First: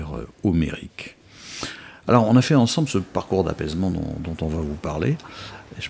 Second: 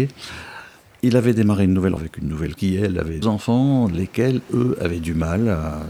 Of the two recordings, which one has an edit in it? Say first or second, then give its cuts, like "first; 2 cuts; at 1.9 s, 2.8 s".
second; 3 cuts; at 2.0 s, 2.6 s, 3.2 s